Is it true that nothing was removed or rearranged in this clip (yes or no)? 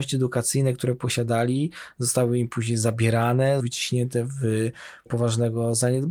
no